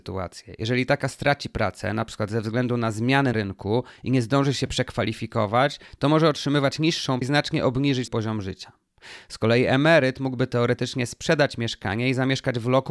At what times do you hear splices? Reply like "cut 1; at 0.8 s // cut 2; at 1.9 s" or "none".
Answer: cut 1; at 1.1 s // cut 2; at 3.3 s // cut 3; at 7.2 s // cut 4; at 8.1 s

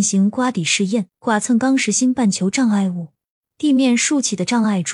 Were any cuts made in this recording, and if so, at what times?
cut 1; at 1.1 s // cut 2; at 3.3 s

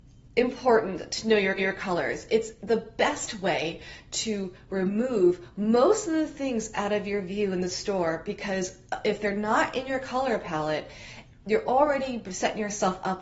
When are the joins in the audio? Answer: cut 1; at 1.6 s

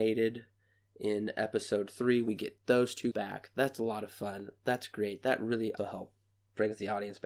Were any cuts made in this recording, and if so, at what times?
cut 1; at 3.1 s // cut 2; at 5.8 s

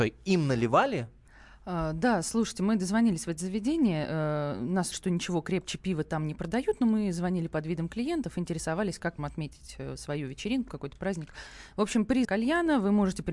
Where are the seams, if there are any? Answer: cut 1; at 4.9 s // cut 2; at 9.2 s // cut 3; at 12.2 s

